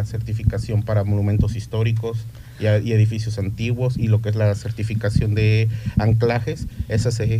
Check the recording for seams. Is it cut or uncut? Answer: uncut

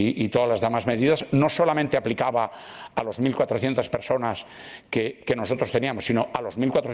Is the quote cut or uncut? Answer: uncut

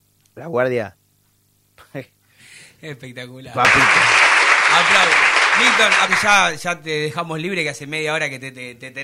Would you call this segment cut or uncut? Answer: cut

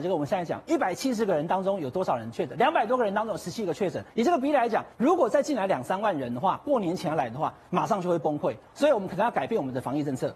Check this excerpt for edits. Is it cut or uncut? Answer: cut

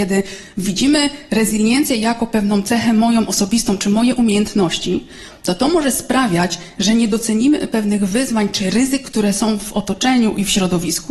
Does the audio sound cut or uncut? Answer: uncut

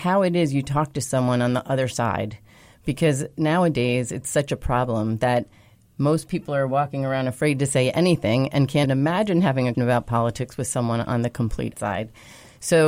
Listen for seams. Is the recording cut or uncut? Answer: cut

